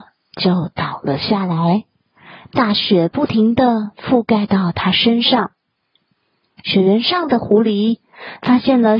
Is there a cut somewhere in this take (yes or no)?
no